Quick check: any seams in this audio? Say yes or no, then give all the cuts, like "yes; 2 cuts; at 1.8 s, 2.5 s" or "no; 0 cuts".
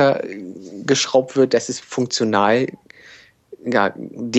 yes; 1 cut; at 1.8 s